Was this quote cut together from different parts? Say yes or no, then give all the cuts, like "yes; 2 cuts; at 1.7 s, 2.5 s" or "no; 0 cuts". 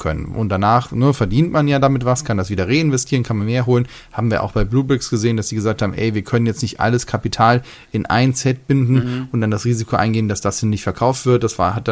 no; 0 cuts